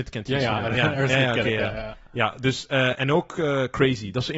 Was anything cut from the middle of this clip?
no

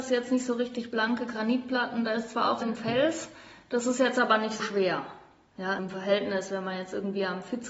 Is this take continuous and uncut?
no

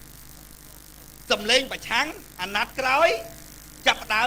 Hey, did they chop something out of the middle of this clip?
no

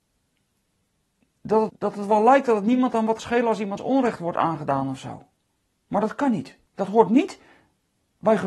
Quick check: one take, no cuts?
no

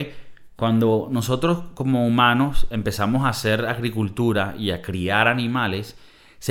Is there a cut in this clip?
no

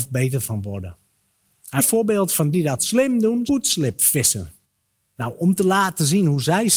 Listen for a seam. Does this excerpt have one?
yes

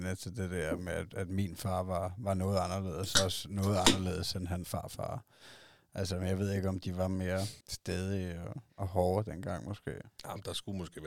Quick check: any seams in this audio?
yes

